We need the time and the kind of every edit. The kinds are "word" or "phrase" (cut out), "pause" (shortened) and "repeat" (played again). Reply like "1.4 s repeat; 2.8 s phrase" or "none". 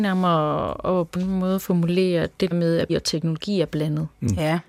1.1 s phrase; 2.5 s word; 2.9 s word